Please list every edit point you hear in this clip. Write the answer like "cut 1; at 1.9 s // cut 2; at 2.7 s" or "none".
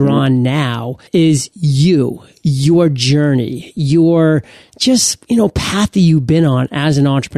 cut 1; at 1.1 s